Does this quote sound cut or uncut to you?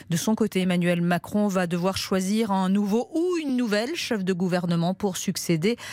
uncut